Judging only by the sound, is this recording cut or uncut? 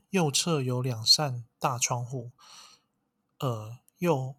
uncut